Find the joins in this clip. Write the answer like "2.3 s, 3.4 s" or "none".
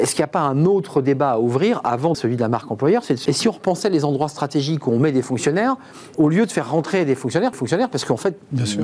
2.1 s, 3.3 s, 6.1 s, 7.5 s